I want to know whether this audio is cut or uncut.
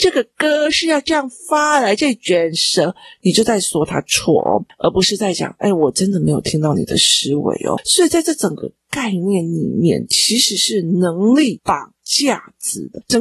uncut